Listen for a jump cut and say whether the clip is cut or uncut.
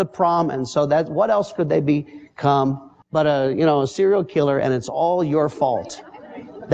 cut